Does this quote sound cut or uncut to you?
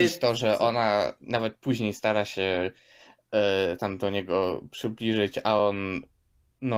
uncut